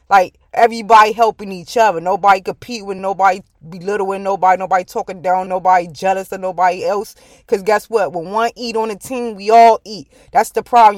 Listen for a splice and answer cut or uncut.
cut